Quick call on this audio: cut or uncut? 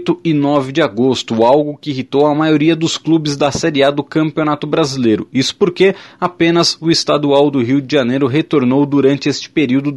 uncut